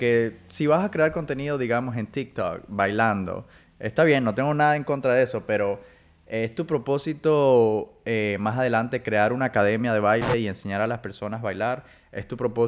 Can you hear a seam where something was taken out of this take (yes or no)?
no